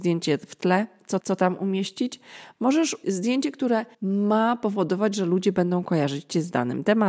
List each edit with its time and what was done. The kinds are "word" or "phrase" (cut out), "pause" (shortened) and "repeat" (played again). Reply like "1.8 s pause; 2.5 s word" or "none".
1.2 s repeat; 3.0 s word; 3.9 s pause